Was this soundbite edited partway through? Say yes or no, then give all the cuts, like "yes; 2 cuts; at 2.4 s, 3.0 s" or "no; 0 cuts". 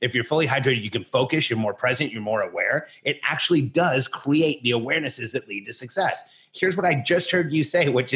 no; 0 cuts